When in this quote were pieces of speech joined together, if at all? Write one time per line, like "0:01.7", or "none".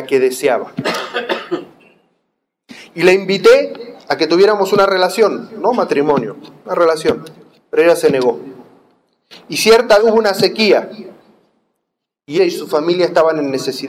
0:10.0
0:12.4